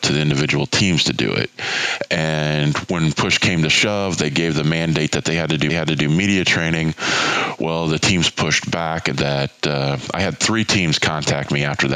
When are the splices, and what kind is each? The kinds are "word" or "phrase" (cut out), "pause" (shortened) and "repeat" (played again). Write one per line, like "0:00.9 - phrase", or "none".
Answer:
0:05.7 - repeat
0:09.1 - phrase